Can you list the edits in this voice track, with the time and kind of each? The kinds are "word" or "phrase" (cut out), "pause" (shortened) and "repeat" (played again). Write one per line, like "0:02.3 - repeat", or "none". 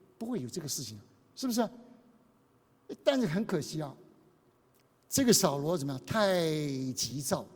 none